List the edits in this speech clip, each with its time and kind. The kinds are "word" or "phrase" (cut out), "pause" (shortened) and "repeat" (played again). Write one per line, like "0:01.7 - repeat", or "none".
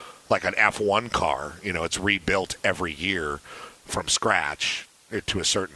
none